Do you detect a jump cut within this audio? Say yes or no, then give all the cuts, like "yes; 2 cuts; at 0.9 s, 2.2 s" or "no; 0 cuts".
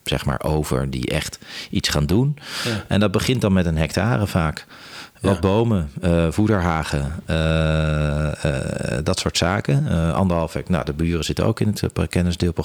no; 0 cuts